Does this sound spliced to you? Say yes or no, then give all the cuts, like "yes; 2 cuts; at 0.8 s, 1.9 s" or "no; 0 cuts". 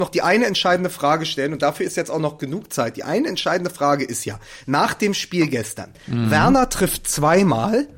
no; 0 cuts